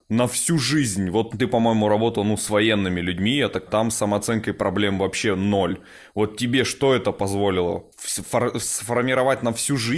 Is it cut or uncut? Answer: cut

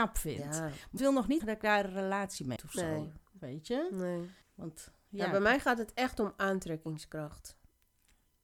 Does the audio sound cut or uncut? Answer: cut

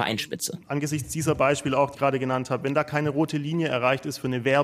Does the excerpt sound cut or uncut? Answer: cut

